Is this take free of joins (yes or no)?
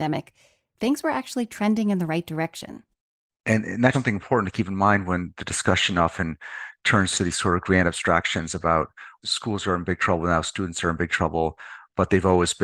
no